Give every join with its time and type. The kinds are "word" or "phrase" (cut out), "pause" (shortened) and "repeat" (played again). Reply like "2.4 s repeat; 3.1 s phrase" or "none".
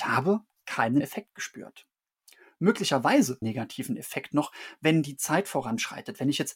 1.0 s word; 3.4 s phrase